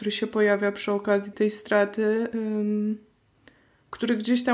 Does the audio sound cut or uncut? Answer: cut